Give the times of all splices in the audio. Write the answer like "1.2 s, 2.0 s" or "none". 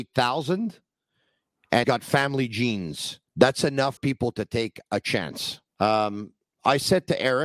1.8 s, 3.3 s, 4.0 s, 5.7 s

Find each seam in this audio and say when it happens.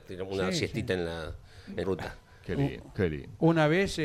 1.8 s

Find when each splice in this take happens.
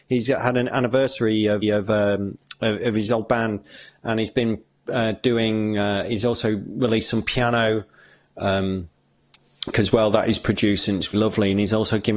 1.6 s, 9.7 s, 11.1 s

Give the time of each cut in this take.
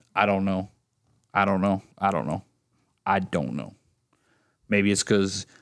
1.9 s

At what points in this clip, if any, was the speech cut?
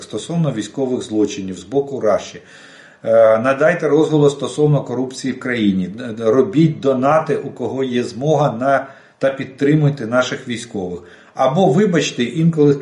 none

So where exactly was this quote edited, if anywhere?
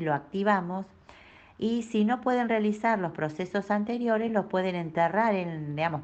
none

